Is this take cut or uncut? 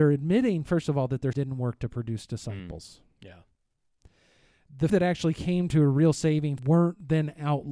cut